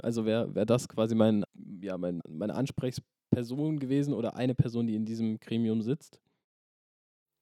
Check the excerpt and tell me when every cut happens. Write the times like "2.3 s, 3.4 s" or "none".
1.4 s, 2.2 s